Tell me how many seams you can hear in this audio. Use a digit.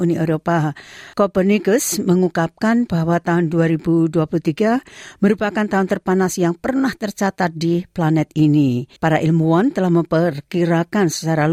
2